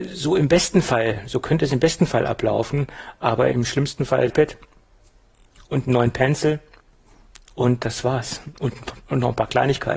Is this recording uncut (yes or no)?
no